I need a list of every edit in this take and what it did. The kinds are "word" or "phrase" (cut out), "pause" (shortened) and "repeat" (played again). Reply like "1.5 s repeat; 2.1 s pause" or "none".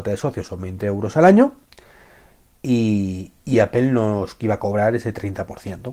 none